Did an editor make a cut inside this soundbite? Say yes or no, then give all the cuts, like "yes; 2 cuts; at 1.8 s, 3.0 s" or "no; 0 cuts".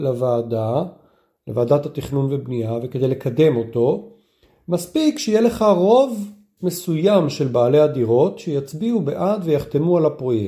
no; 0 cuts